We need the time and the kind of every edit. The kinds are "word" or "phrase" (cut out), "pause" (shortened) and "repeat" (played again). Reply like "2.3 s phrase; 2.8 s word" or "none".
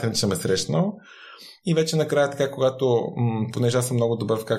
none